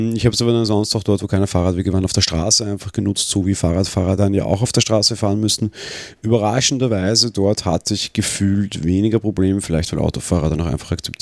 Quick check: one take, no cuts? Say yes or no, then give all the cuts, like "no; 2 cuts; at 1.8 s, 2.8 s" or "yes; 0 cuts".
yes; 0 cuts